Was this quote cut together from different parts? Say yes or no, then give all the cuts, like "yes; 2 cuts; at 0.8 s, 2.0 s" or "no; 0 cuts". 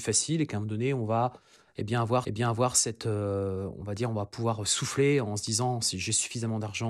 yes; 1 cut; at 2.2 s